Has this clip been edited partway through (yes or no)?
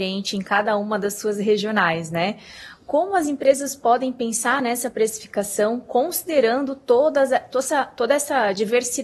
no